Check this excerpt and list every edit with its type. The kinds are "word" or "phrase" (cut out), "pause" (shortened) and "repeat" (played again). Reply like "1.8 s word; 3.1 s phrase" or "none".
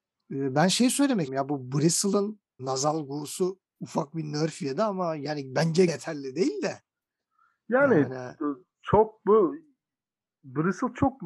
1.3 s word; 2.6 s word; 5.9 s word